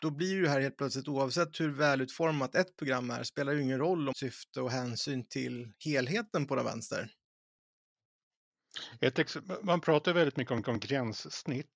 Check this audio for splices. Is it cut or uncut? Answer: cut